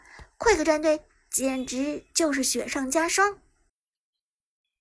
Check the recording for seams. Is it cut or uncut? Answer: uncut